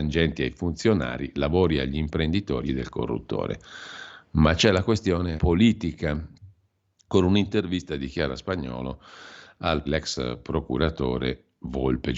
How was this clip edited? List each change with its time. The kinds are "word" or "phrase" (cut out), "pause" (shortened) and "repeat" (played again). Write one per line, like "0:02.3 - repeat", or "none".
0:02.7 - word
0:05.4 - word
0:09.9 - word